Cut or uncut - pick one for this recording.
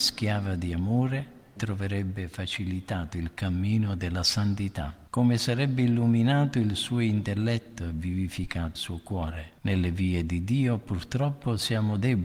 cut